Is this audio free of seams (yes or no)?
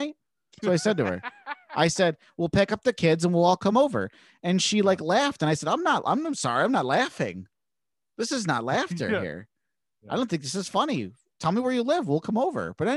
yes